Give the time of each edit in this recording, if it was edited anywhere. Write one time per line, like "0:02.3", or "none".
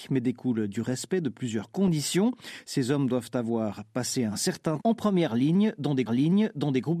0:04.8
0:06.1

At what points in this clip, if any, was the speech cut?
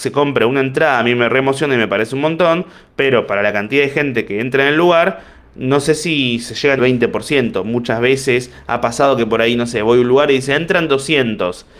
0:06.8

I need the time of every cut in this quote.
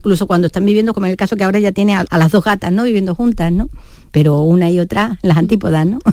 0:00.9
0:02.1

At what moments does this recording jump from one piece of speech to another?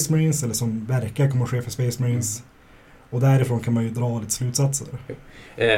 none

